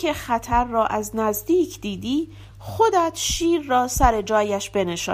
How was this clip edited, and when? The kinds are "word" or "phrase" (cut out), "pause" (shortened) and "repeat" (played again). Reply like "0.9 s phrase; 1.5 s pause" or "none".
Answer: none